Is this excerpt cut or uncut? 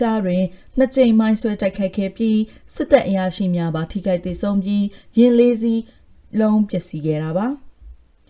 uncut